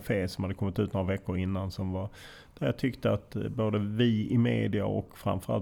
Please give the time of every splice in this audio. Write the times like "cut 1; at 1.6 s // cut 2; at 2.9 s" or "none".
none